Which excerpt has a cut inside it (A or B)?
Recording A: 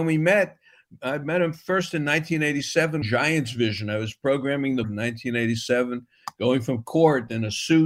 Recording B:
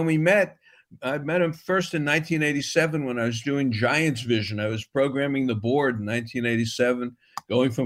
A